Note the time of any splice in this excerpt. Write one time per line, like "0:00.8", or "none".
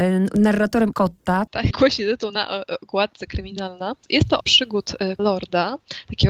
0:00.9
0:01.7
0:03.3
0:04.4
0:05.2